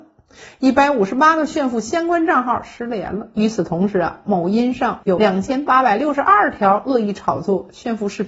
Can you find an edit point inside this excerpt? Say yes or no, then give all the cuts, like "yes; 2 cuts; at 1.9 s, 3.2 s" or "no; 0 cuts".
yes; 1 cut; at 5.0 s